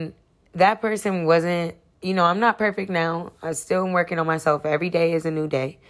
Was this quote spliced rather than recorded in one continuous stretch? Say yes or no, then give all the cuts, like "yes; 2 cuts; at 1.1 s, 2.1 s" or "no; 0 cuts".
no; 0 cuts